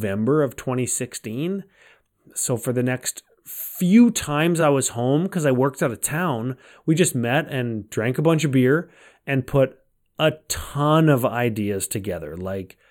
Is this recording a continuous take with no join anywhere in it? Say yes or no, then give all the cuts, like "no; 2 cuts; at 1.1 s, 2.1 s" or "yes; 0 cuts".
yes; 0 cuts